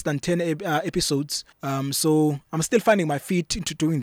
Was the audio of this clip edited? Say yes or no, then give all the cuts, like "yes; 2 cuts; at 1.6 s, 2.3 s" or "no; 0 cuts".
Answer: yes; 1 cut; at 1.5 s